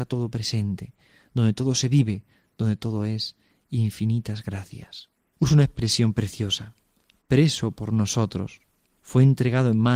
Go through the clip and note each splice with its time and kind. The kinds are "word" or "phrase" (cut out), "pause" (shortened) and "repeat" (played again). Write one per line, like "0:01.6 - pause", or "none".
none